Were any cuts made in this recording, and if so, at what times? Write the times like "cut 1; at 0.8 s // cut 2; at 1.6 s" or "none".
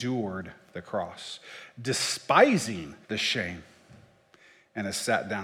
cut 1; at 3.0 s